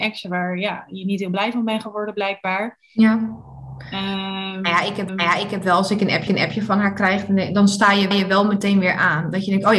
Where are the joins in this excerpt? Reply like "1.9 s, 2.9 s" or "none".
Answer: 5.1 s, 6.3 s, 8.1 s